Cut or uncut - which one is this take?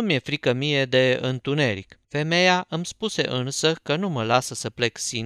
cut